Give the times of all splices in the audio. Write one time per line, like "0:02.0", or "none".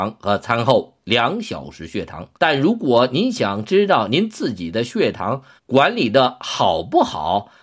0:02.4
0:05.6